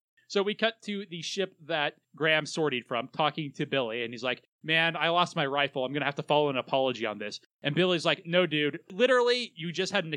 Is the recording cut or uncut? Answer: cut